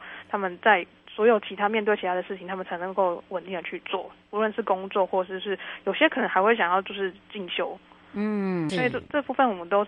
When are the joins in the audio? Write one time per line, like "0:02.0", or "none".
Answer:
0:08.7